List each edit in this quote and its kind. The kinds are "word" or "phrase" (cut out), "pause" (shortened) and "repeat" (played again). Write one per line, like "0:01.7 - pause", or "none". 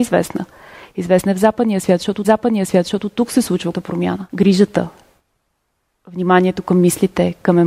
0:02.2 - repeat
0:03.7 - word
0:04.3 - pause